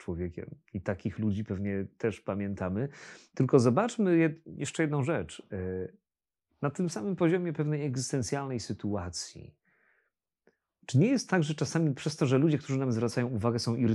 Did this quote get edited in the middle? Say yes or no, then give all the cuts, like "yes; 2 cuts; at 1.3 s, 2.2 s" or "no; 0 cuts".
no; 0 cuts